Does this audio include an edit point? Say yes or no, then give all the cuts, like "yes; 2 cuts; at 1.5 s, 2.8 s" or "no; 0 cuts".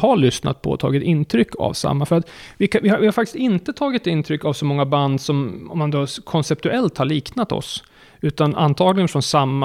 no; 0 cuts